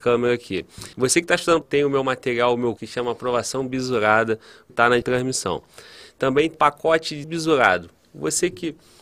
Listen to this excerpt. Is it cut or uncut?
cut